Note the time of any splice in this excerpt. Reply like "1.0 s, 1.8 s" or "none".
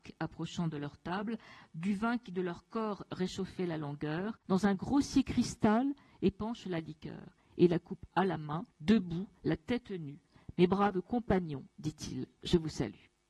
4.4 s, 8.7 s